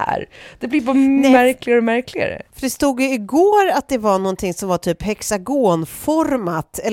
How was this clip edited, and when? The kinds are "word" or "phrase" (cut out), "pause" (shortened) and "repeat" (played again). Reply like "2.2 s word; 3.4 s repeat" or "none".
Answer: 2.5 s pause